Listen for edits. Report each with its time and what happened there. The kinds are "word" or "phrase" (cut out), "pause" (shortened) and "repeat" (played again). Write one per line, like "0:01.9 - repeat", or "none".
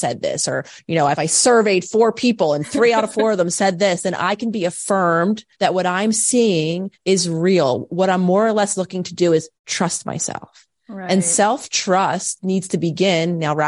0:05.5 - pause
0:06.9 - pause
0:09.6 - pause

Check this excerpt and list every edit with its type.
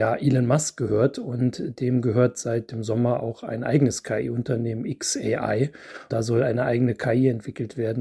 0:06.1 - word

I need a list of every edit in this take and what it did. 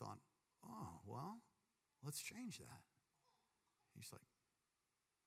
none

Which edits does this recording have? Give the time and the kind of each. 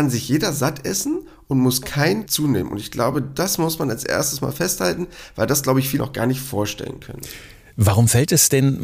0:02.3 - word
0:06.0 - word

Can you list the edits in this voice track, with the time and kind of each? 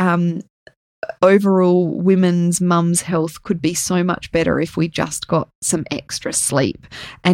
none

